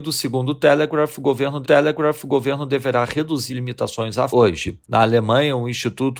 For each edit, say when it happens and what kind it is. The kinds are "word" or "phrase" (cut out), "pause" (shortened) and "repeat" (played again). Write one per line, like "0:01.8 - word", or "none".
0:01.6 - repeat
0:03.5 - word
0:04.3 - word
0:04.8 - pause